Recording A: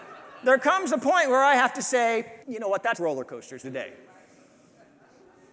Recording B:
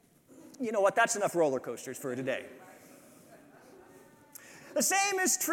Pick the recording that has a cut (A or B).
A